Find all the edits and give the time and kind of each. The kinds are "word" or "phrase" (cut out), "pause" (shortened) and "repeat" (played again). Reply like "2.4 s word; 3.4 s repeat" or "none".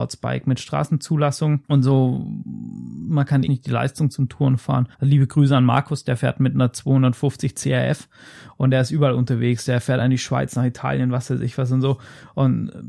1.6 s pause; 3.5 s phrase; 4.9 s pause